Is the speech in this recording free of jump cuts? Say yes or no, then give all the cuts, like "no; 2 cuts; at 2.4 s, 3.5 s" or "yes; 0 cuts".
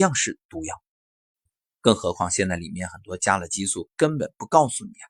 no; 1 cut; at 1.3 s